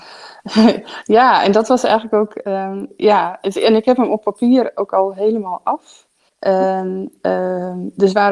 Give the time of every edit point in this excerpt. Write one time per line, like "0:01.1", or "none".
0:06.3